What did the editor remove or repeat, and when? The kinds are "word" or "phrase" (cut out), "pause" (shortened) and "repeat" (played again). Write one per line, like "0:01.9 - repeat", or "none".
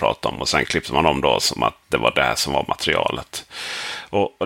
none